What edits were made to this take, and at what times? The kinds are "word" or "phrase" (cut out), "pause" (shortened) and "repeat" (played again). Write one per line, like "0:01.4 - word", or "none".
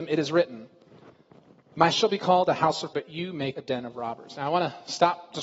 0:01.9 - word
0:02.9 - word
0:03.5 - word